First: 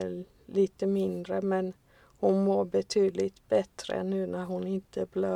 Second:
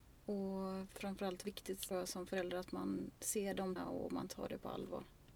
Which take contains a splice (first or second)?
second